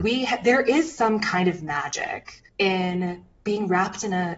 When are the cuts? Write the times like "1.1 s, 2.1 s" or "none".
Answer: 2.5 s